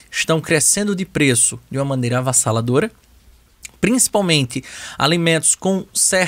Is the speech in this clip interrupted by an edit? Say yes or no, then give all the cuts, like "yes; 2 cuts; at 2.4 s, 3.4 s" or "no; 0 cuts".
no; 0 cuts